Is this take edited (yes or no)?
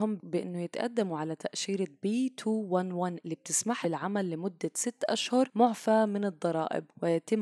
yes